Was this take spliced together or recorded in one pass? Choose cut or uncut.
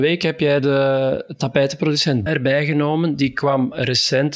cut